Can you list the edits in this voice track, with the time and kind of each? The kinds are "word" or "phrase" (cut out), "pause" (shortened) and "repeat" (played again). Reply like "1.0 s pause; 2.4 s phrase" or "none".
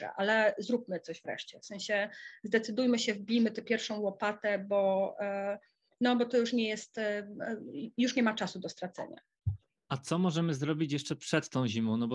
none